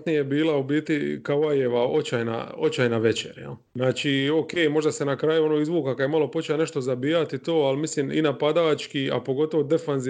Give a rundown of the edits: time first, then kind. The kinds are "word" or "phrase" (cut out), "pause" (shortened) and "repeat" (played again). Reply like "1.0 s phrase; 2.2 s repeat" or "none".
3.7 s pause